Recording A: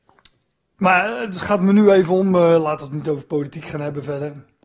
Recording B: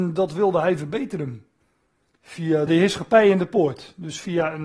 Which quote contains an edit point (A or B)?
B